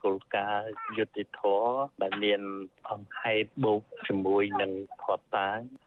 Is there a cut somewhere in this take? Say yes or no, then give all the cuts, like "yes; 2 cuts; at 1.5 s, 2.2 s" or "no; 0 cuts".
yes; 1 cut; at 3.5 s